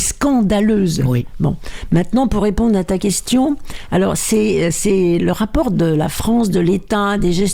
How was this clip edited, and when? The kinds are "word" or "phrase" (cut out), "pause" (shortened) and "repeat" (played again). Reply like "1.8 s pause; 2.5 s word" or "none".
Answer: none